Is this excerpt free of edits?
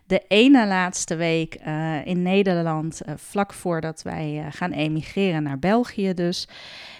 yes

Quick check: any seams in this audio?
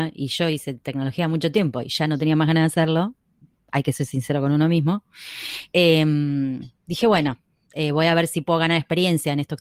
no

